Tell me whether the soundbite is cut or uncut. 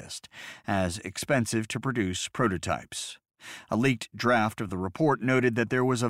uncut